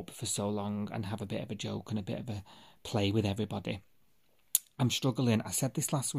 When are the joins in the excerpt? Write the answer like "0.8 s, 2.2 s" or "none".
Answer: none

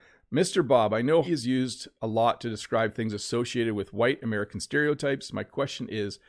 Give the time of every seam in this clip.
1.2 s

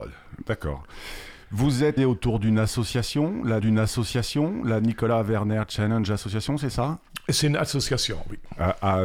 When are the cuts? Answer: 2.0 s, 3.6 s

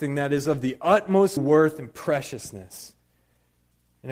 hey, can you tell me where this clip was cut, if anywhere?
1.4 s

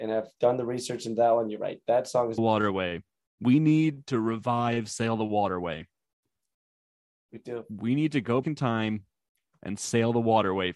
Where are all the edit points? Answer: 2.4 s, 8.4 s

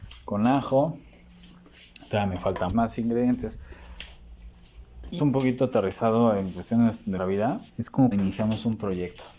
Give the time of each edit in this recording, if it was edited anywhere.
2.7 s, 5.2 s, 7.2 s, 7.7 s, 8.1 s

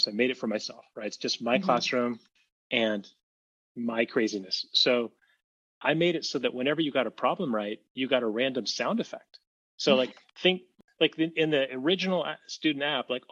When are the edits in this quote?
none

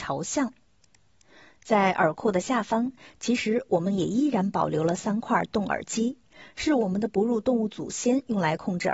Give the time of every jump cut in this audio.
none

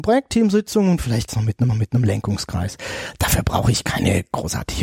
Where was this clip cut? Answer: 1.3 s, 1.7 s

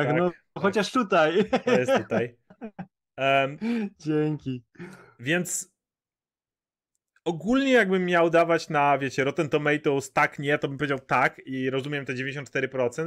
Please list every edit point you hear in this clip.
none

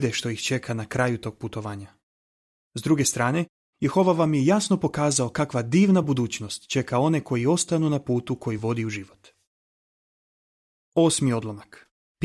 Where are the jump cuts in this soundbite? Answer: none

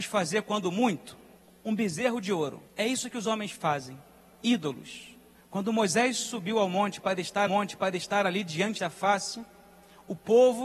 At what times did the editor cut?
1.4 s, 2.7 s, 5.3 s, 7.5 s, 8.8 s

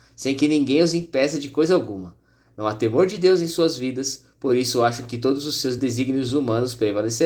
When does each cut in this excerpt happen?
none

